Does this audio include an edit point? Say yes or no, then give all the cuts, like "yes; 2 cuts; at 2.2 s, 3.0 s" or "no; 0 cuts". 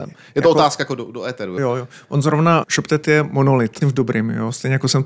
yes; 3 cuts; at 1.6 s, 2.6 s, 3.8 s